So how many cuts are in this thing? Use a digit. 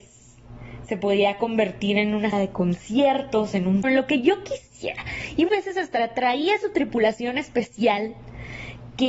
3